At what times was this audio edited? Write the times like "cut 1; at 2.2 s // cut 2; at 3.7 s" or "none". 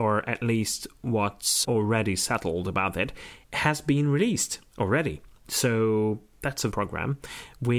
cut 1; at 1.6 s // cut 2; at 3.4 s // cut 3; at 6.7 s